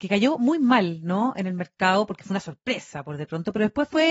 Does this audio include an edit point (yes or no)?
no